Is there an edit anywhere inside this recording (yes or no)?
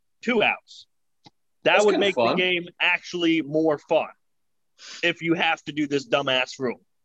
no